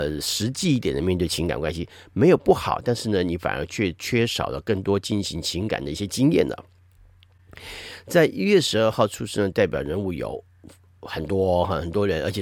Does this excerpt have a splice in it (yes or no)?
no